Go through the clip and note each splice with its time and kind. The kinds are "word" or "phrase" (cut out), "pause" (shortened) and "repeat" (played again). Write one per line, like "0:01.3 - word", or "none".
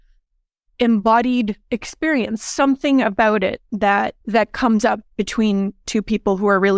0:04.2 - pause